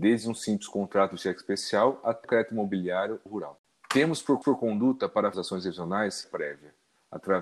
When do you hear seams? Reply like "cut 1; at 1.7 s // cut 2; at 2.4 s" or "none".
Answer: cut 1; at 2.2 s // cut 2; at 3.3 s // cut 3; at 4.4 s // cut 4; at 5.3 s // cut 5; at 6.2 s